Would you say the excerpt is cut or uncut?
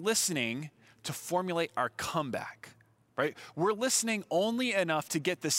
uncut